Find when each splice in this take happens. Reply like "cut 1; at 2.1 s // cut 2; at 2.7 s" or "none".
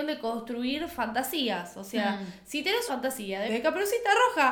cut 1; at 2.9 s // cut 2; at 3.5 s

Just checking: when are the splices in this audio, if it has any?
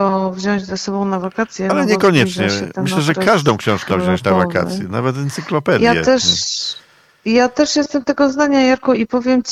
cut 1; at 3.9 s

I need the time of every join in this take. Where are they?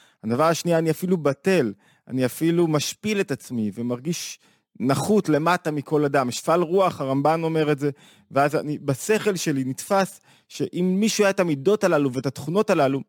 none

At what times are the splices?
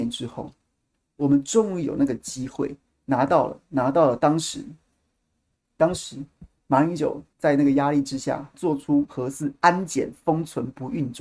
cut 1; at 7.3 s

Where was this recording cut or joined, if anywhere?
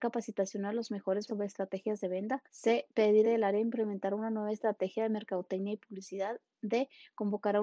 cut 1; at 1.3 s // cut 2; at 2.5 s // cut 3; at 3.2 s

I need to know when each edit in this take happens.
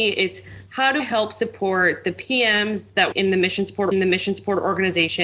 cut 1; at 1.0 s // cut 2; at 3.1 s // cut 3; at 3.9 s

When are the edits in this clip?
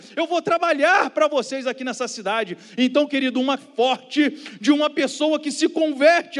cut 1; at 3.6 s

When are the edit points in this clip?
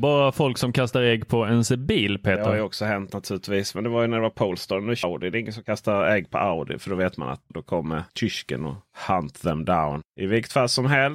cut 1; at 5.0 s // cut 2; at 7.5 s // cut 3; at 8.1 s // cut 4; at 10.1 s

